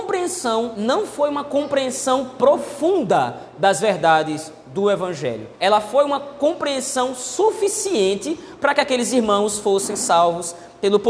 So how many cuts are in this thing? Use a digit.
1